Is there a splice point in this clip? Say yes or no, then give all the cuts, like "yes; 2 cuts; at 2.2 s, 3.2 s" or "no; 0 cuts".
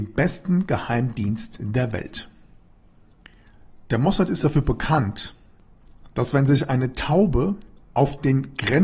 no; 0 cuts